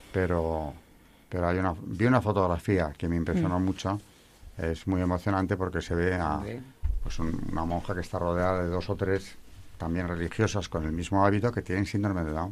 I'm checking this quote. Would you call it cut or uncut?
uncut